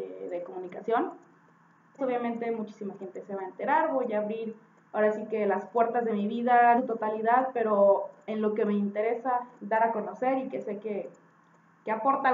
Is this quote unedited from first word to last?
no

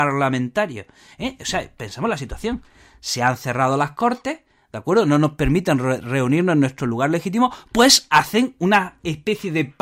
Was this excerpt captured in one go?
yes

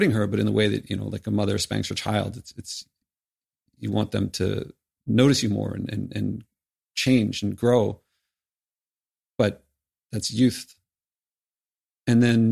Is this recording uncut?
yes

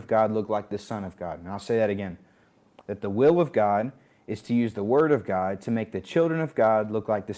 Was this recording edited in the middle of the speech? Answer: no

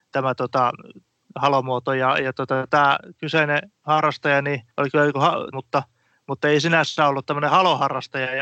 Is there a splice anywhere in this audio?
yes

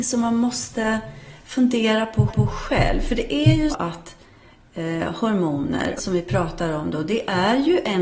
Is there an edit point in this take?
yes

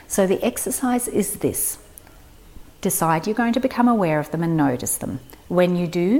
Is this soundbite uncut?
no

